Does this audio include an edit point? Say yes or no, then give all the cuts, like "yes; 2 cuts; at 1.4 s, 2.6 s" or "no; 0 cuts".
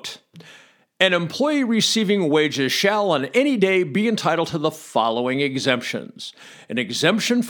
no; 0 cuts